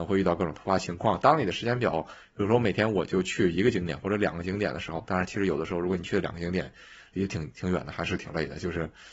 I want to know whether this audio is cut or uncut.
uncut